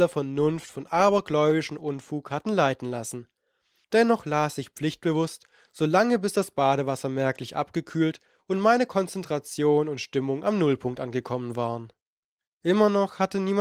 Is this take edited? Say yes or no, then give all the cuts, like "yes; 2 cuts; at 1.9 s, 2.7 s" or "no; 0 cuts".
no; 0 cuts